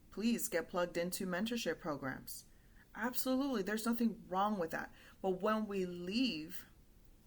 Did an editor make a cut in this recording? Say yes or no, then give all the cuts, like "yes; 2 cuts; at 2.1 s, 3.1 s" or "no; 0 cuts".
no; 0 cuts